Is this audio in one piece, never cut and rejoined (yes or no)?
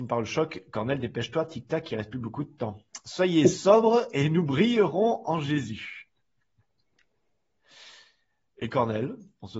yes